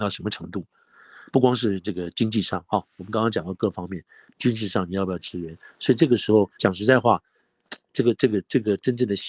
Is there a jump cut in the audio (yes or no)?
yes